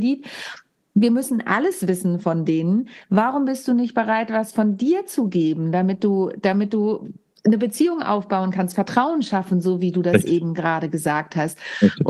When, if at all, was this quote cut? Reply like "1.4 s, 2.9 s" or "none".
none